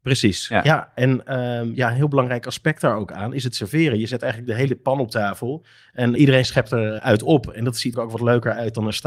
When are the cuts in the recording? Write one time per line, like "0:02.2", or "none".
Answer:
0:06.2
0:07.0
0:07.9